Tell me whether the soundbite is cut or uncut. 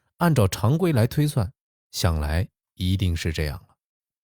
uncut